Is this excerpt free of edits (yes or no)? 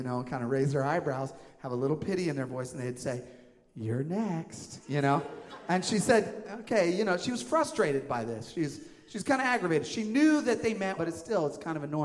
no